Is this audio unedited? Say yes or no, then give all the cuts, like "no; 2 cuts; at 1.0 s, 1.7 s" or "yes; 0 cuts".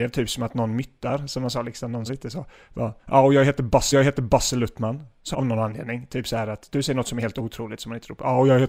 no; 4 cuts; at 2.1 s, 3.0 s, 3.9 s, 5.3 s